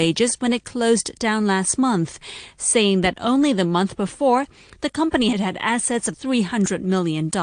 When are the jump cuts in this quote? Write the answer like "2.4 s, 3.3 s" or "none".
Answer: 5.3 s, 6.1 s